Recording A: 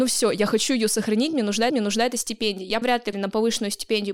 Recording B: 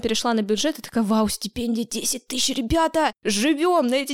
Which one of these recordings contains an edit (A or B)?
A